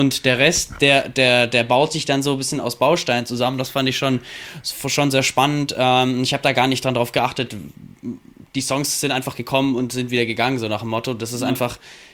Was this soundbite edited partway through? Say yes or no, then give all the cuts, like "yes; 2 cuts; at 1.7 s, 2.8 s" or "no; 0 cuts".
no; 0 cuts